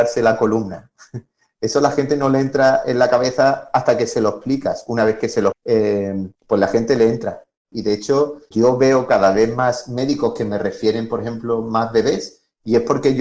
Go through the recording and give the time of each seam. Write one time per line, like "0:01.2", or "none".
0:05.5
0:06.3
0:08.5

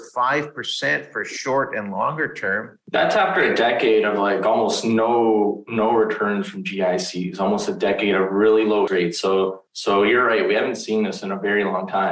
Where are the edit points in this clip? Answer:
0:08.9
0:09.7

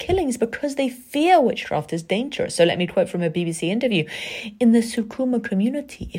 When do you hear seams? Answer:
none

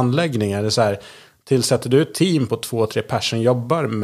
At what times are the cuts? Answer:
none

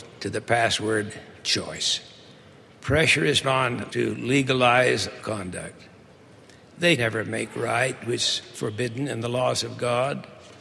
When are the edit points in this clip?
0:03.4
0:03.9
0:05.2
0:07.0
0:08.0
0:08.5

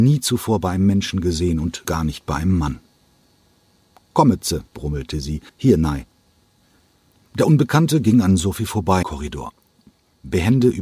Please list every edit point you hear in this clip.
0:01.8
0:04.7
0:05.5
0:09.0

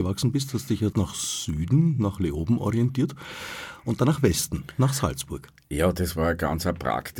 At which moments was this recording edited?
0:00.9

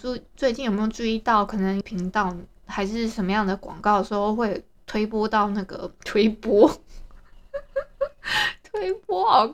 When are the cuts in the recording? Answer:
0:01.8

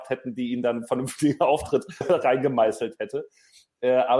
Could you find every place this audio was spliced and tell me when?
0:02.0

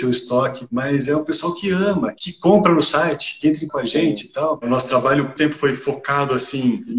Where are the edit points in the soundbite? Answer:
0:03.7
0:05.4

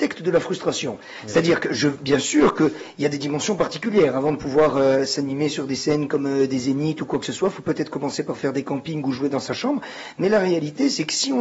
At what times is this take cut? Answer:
none

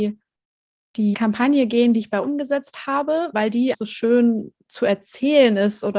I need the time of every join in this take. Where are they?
0:01.1
0:02.2
0:03.3
0:03.7

